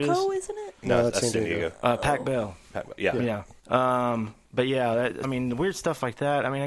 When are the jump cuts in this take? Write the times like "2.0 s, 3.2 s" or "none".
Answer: 3.6 s, 4.4 s, 5.2 s